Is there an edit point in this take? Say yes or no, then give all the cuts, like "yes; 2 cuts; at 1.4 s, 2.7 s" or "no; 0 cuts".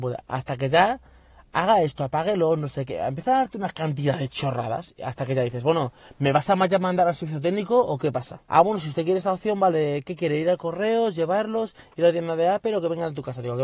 yes; 1 cut; at 8.5 s